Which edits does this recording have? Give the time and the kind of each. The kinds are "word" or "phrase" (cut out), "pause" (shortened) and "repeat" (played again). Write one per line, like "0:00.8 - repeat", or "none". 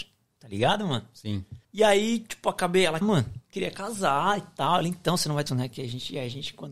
0:01.6 - pause
0:03.0 - phrase
0:03.4 - pause
0:05.5 - phrase

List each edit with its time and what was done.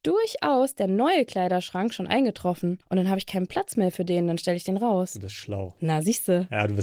0:02.8 - pause

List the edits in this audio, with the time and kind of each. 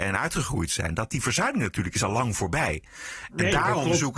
none

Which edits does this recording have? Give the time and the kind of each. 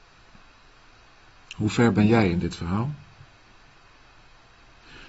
none

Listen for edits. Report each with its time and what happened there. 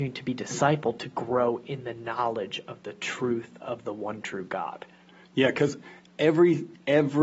none

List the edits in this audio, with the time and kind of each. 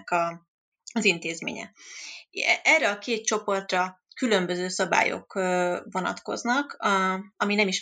none

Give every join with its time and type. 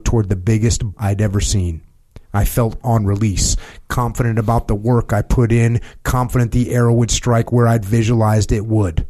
0:00.9 - word
0:02.3 - pause
0:02.8 - phrase

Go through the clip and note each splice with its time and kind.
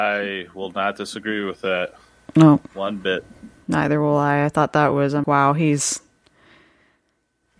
0:05.2 - word

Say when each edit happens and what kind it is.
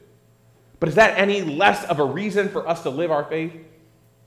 none

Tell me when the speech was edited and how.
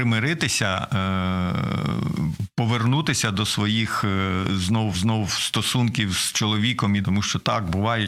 0:04.9 - repeat
0:07.0 - word

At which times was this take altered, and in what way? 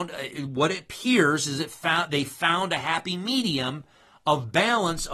none

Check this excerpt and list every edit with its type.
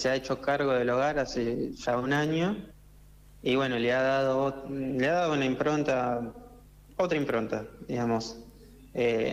none

